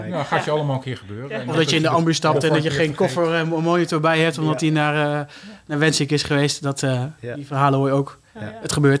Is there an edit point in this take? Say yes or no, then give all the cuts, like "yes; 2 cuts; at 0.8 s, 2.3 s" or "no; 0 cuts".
no; 0 cuts